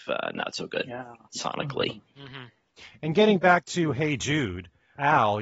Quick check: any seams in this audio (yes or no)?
yes